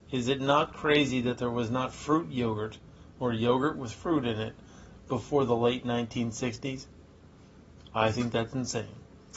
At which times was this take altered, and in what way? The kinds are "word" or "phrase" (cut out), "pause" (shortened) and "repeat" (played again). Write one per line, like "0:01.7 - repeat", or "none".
none